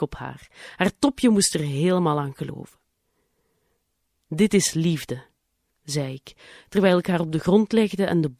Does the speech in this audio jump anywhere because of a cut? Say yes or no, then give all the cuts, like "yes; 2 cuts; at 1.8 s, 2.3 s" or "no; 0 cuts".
no; 0 cuts